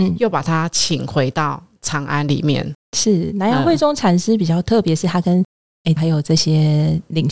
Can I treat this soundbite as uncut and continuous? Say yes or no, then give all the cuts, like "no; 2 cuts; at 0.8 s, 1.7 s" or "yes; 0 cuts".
no; 1 cut; at 6.0 s